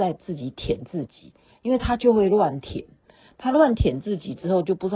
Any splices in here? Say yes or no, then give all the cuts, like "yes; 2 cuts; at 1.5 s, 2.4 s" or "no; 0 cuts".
no; 0 cuts